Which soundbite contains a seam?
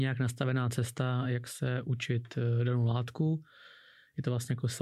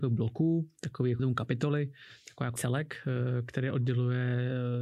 second; 2 cuts; at 1.2 s, 2.6 s

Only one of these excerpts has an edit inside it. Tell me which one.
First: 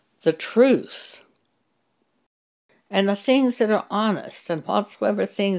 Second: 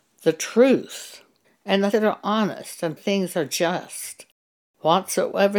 second; 3 cuts; at 1.4 s, 1.9 s, 3.0 s

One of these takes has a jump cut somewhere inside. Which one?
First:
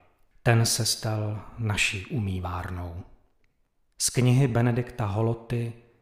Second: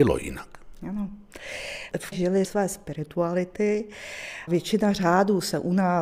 second; 3 cuts; at 2.1 s, 2.4 s, 4.5 s

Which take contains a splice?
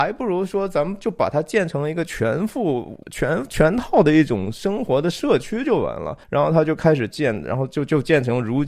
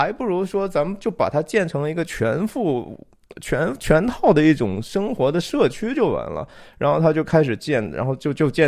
first; 2 cuts; at 3.0 s, 6.2 s

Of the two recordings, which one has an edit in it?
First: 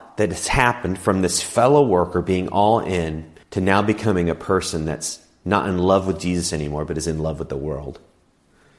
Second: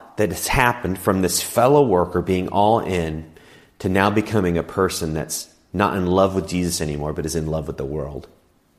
first; 1 cut; at 3.4 s

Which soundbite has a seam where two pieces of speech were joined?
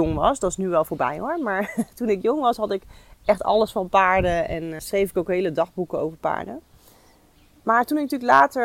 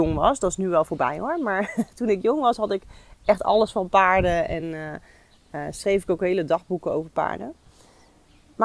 first; 1 cut; at 4.8 s

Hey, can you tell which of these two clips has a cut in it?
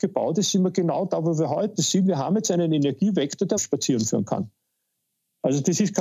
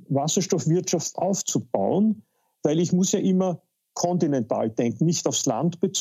first; 1 cut; at 3.6 s

